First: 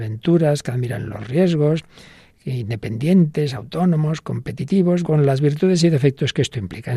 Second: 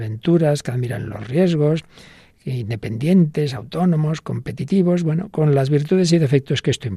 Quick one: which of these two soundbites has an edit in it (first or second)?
first